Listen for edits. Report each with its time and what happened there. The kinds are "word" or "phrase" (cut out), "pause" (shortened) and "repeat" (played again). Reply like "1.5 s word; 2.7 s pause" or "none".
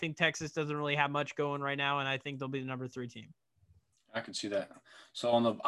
none